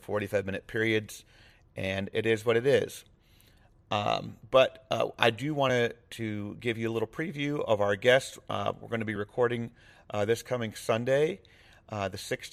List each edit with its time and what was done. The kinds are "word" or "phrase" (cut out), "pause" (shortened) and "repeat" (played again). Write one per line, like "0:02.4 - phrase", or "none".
none